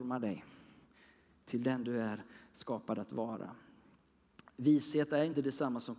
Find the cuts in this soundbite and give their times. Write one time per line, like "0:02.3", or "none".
none